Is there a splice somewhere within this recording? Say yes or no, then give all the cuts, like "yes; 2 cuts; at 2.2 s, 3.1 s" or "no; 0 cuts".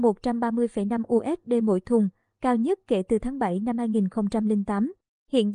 no; 0 cuts